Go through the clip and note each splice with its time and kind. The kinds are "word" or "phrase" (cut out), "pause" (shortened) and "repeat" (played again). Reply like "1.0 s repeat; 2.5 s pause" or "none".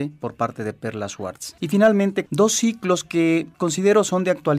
1.6 s pause; 2.3 s word; 3.5 s pause